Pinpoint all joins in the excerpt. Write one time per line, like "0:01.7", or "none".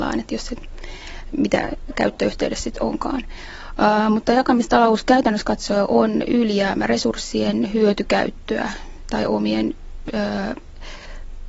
none